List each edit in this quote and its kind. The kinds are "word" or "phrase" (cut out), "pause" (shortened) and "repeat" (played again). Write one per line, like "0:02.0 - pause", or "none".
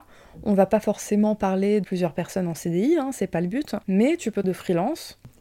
0:01.8 - word
0:03.8 - pause
0:04.4 - word